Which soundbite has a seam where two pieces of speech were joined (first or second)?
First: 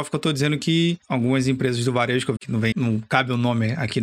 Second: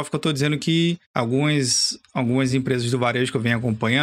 first